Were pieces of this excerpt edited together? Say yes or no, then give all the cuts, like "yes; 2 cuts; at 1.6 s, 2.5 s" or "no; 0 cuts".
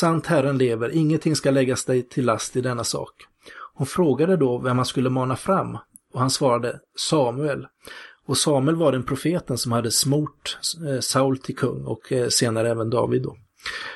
no; 0 cuts